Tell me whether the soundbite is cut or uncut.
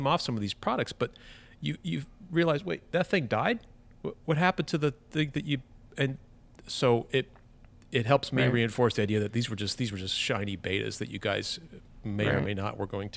uncut